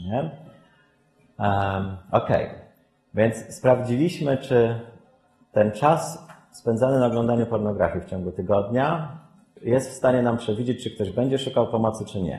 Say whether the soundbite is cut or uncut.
uncut